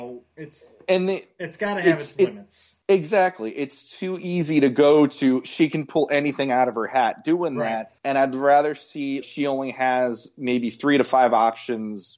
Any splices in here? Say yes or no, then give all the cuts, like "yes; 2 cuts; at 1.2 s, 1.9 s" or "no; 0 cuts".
yes; 3 cuts; at 2.8 s, 8.0 s, 9.2 s